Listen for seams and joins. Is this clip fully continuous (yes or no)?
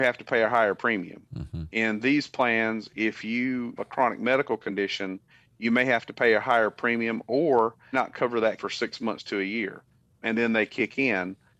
no